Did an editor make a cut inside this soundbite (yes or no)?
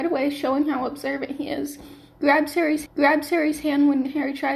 yes